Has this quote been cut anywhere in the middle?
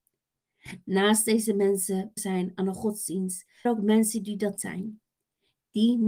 yes; 3 cuts; at 2.2 s, 3.7 s, 4.6 s

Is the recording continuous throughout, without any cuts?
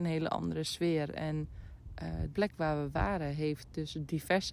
no; 1 cut; at 2.3 s

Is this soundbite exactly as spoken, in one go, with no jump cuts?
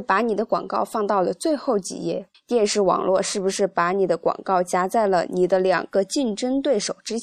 no; 1 cut; at 2.3 s

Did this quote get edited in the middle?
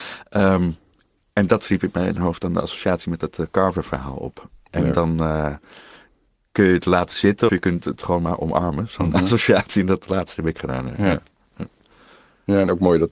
yes; 1 cut; at 7.5 s

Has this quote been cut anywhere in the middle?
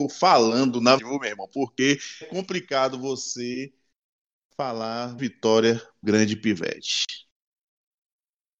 yes; 4 cuts; at 1.0 s, 2.2 s, 5.2 s, 6.0 s

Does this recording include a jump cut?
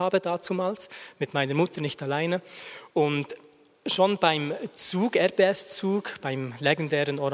no; 0 cuts

